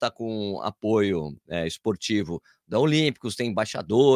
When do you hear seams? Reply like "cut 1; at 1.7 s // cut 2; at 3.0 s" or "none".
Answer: none